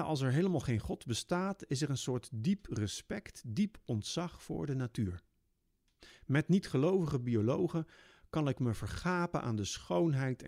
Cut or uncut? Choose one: uncut